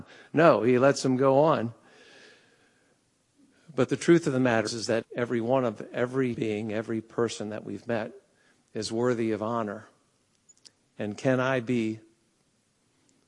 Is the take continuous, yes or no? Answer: no